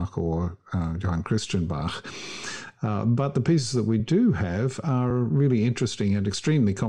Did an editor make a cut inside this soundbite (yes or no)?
no